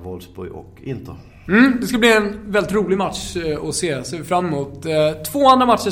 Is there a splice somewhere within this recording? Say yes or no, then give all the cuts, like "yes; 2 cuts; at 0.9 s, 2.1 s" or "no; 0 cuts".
no; 0 cuts